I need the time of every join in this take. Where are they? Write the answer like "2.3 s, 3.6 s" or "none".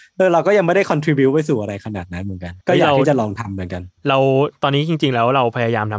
2.6 s, 4.0 s